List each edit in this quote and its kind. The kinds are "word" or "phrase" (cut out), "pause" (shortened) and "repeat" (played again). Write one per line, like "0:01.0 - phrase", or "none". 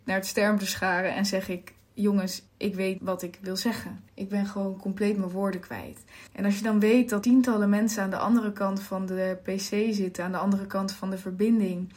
0:02.5 - pause
0:03.0 - word
0:04.1 - pause
0:06.3 - pause
0:07.2 - word